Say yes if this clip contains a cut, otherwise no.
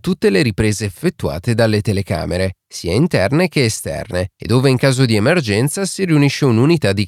no